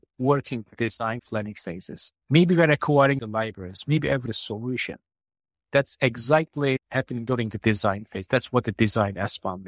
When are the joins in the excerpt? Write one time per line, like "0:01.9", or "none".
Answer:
0:01.2
0:02.2
0:03.2
0:04.3